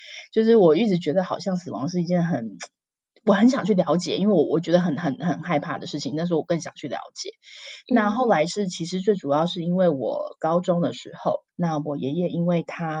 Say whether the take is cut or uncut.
cut